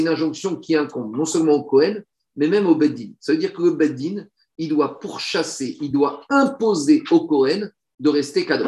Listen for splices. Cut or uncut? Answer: uncut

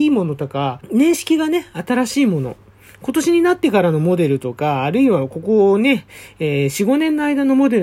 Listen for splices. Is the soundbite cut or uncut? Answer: uncut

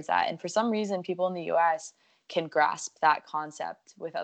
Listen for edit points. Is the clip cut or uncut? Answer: uncut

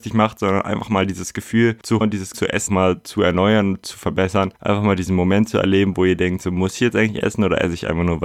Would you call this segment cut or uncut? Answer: cut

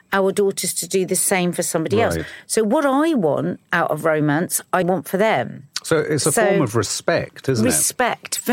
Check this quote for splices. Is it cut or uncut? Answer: cut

